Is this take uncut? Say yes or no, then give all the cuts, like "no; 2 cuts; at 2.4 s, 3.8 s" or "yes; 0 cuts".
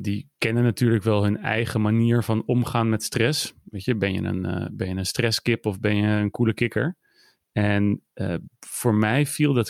yes; 0 cuts